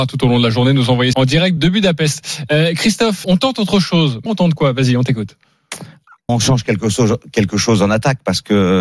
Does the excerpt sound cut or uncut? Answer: cut